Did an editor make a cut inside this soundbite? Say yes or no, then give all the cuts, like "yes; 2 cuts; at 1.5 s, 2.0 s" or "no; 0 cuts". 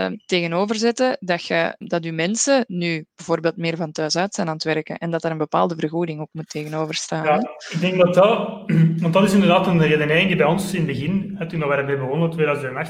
yes; 1 cut; at 1.8 s